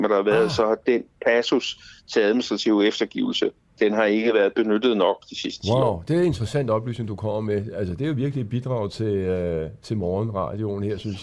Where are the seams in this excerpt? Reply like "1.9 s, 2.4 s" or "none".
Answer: none